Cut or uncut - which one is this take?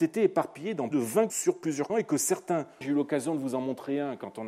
cut